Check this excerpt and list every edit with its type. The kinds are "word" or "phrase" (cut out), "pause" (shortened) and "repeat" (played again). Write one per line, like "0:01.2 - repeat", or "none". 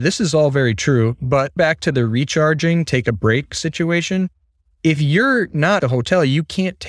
0:01.6 - word
0:05.8 - word